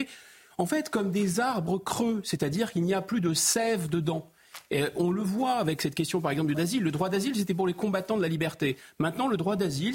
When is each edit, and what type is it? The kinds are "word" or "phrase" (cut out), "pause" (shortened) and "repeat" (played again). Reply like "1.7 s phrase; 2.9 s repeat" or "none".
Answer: 6.5 s word